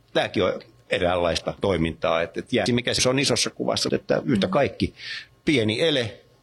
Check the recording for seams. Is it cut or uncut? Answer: cut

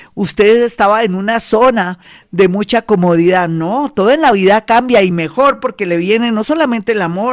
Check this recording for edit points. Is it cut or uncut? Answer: uncut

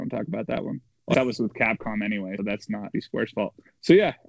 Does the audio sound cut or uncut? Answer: cut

